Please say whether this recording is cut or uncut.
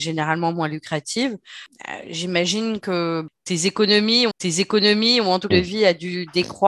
cut